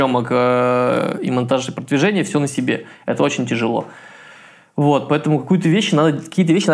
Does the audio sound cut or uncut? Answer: uncut